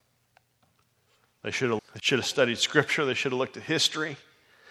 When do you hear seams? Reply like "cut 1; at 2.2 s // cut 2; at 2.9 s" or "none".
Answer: cut 1; at 1.8 s